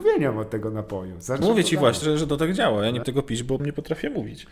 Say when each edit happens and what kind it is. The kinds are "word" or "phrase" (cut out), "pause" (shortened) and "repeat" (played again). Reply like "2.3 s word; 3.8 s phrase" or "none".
1.4 s word; 2.0 s word; 3.0 s word; 3.6 s word